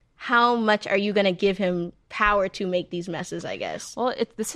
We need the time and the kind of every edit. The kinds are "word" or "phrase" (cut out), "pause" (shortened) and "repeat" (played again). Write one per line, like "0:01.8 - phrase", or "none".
0:02.0 - pause